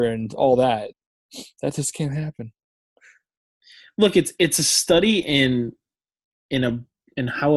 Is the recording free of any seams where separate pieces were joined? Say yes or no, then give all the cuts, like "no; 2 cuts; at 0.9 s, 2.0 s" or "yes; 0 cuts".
yes; 0 cuts